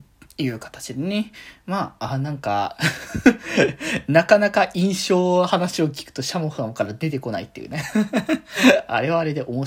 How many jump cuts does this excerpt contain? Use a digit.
0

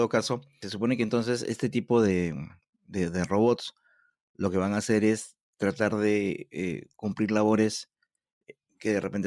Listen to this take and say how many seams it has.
0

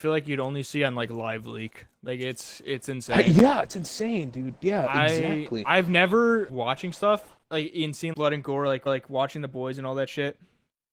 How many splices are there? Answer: 4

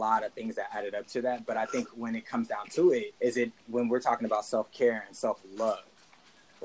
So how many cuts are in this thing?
1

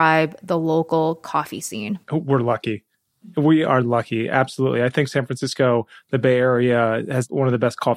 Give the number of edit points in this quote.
1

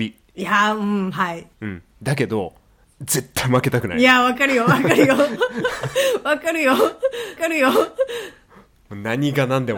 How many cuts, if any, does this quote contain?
2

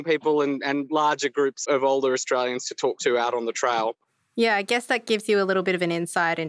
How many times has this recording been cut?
0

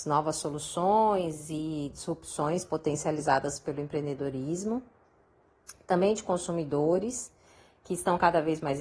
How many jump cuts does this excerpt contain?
0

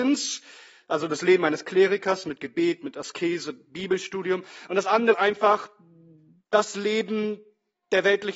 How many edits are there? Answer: 1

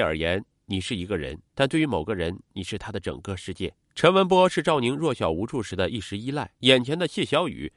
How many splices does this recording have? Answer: 3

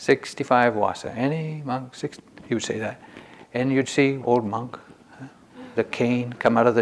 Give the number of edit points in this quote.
2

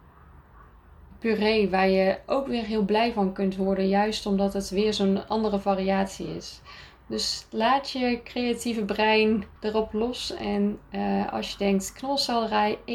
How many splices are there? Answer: 1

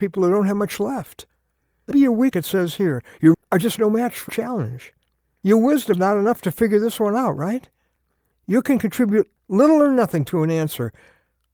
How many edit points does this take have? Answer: 5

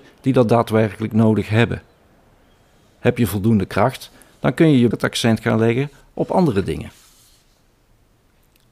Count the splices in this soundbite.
1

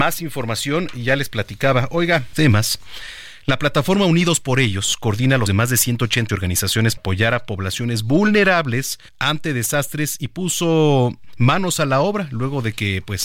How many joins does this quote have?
5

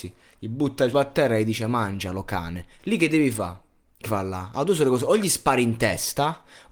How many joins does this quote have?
3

